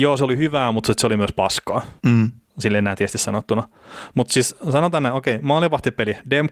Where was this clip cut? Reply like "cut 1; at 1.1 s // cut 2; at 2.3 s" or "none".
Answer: cut 1; at 2.0 s